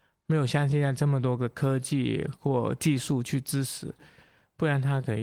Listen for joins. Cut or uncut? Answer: uncut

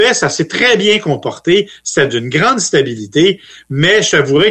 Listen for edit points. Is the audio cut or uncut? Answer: uncut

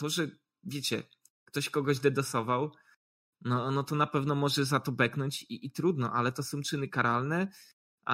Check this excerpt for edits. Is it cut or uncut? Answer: uncut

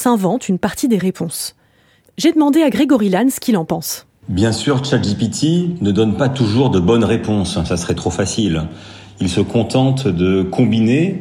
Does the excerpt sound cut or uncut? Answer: uncut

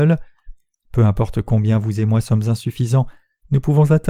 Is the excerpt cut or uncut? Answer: uncut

